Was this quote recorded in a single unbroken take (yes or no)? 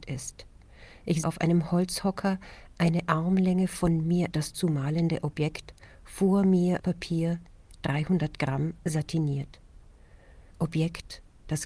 no